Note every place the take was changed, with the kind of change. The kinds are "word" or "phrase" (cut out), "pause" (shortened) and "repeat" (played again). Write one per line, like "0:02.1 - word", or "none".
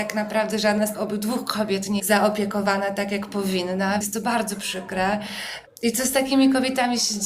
0:00.9 - word
0:02.0 - phrase
0:04.0 - word